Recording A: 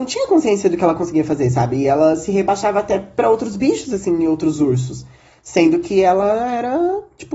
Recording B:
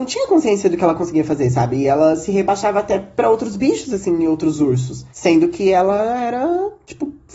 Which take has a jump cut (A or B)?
B